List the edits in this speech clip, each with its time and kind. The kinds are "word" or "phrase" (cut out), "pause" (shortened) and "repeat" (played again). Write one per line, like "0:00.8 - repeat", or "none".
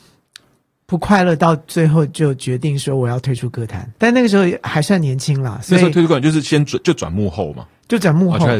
0:04.0 - pause